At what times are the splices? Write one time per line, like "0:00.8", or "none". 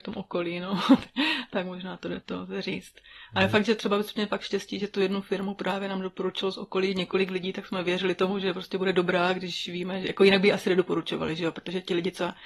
0:02.2